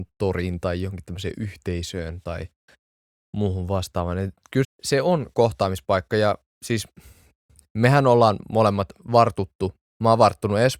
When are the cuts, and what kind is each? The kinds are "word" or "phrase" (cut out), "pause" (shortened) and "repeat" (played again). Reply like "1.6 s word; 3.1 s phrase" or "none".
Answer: 4.6 s word